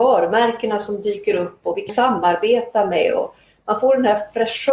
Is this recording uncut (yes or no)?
no